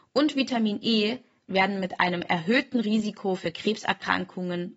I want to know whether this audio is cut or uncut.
uncut